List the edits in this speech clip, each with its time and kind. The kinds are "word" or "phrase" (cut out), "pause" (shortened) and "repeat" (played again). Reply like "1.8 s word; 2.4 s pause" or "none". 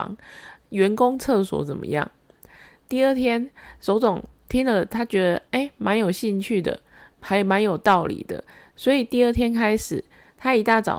none

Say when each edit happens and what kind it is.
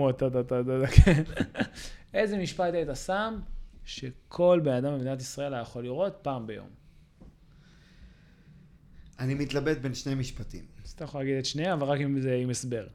none

